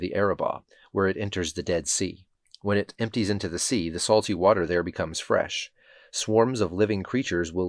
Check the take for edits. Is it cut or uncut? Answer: uncut